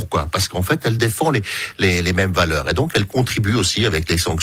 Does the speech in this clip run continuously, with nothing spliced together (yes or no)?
yes